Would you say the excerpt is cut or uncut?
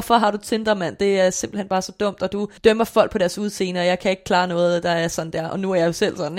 cut